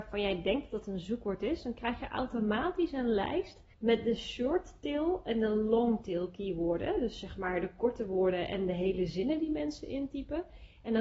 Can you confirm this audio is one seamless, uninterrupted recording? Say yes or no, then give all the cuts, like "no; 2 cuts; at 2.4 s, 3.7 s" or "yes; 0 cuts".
no; 1 cut; at 3.7 s